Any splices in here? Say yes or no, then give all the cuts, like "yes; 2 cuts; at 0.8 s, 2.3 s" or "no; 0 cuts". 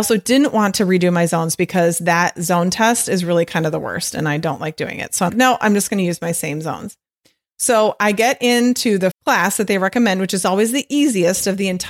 yes; 2 cuts; at 5.3 s, 9.1 s